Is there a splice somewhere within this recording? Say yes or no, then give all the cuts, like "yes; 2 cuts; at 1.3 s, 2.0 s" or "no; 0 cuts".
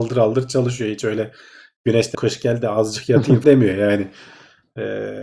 yes; 2 cuts; at 2.1 s, 3.4 s